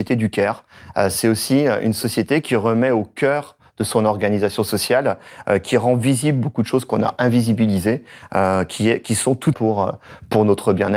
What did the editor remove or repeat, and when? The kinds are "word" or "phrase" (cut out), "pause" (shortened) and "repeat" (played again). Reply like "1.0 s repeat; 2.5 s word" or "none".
9.5 s phrase